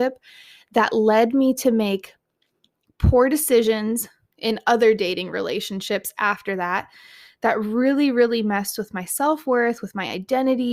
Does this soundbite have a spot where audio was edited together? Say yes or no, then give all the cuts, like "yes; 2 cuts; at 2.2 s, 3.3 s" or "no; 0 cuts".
no; 0 cuts